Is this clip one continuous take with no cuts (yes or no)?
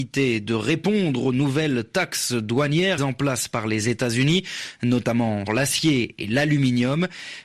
no